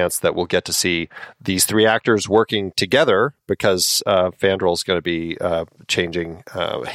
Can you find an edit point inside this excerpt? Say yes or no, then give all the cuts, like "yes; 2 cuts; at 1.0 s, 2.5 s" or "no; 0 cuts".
no; 0 cuts